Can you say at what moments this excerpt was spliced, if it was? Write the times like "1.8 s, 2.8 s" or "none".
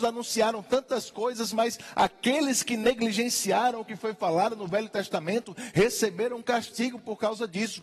none